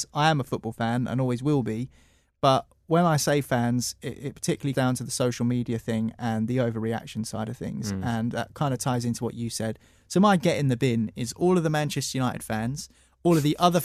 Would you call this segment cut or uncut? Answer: cut